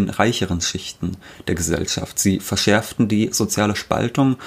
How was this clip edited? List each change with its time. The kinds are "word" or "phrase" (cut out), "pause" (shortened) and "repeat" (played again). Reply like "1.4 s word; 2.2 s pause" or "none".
none